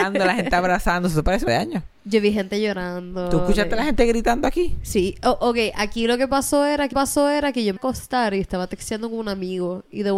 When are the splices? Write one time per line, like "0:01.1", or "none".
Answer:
0:01.5
0:06.9
0:07.8